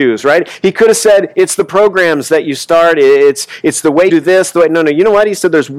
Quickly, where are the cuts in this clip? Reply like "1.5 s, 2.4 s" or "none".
4.1 s